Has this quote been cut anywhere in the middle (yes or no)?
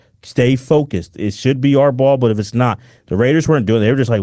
no